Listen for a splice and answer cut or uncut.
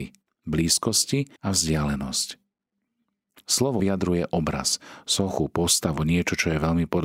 cut